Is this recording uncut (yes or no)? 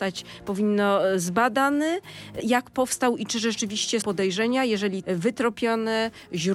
no